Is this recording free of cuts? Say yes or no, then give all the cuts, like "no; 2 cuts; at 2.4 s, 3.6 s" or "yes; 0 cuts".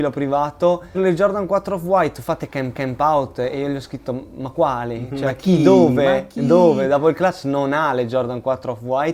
no; 2 cuts; at 0.9 s, 2.7 s